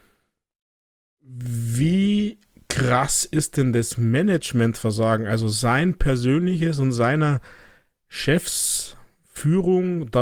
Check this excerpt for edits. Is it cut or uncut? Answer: uncut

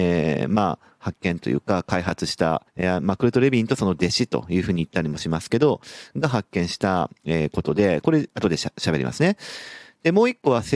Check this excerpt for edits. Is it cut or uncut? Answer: cut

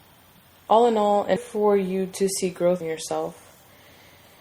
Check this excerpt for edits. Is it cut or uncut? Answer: cut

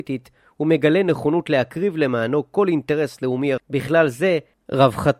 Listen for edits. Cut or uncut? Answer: cut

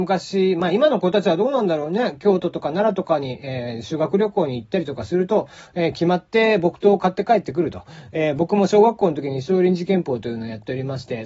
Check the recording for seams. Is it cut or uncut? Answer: uncut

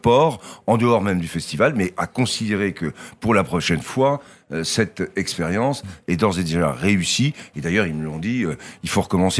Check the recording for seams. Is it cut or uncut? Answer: uncut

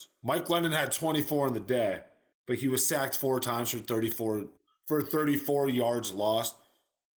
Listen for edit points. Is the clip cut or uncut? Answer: uncut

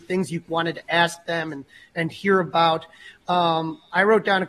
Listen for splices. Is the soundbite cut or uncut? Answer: uncut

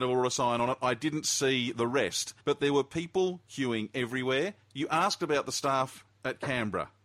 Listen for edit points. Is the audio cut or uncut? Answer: cut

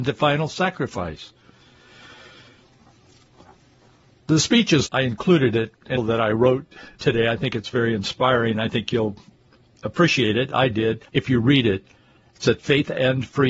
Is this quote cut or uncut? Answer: cut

